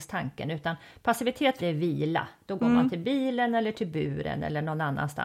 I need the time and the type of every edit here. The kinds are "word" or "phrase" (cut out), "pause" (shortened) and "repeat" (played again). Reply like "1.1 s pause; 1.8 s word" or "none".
1.6 s word